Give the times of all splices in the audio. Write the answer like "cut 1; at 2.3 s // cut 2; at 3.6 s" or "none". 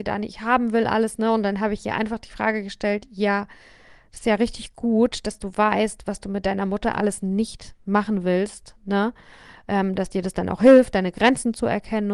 none